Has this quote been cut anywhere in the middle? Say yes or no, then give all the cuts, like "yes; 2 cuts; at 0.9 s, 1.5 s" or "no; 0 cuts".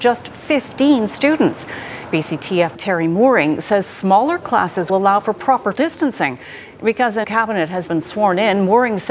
yes; 5 cuts; at 2.7 s, 4.9 s, 5.7 s, 7.2 s, 7.9 s